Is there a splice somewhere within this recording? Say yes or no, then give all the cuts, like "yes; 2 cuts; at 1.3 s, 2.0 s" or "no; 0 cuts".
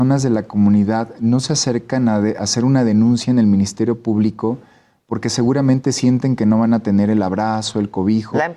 no; 0 cuts